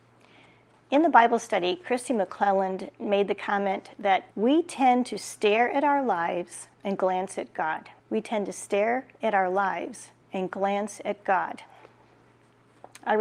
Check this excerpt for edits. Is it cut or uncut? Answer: cut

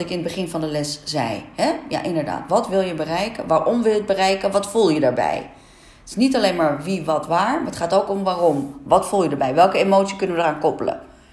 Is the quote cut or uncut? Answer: uncut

